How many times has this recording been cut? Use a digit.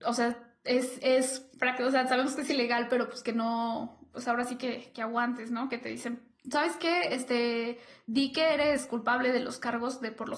0